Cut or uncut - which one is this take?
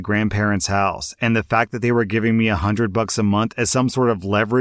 uncut